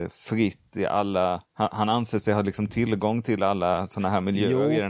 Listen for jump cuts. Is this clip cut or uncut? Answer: cut